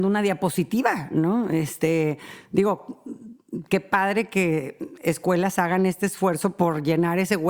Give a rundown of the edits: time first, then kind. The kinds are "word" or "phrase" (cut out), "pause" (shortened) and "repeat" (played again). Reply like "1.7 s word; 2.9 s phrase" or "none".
6.6 s word